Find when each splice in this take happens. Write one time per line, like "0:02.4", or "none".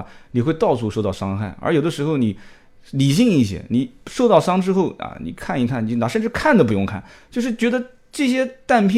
none